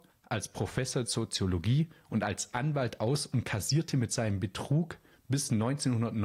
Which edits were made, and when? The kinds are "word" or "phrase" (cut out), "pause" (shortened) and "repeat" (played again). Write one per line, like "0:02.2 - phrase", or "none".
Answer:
0:01.0 - word